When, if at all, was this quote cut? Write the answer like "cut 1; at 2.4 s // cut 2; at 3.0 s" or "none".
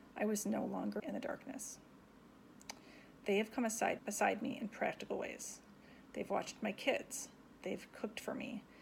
cut 1; at 1.0 s // cut 2; at 4.0 s